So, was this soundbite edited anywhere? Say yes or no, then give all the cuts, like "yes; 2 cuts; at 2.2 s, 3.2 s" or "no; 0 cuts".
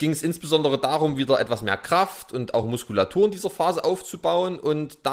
no; 0 cuts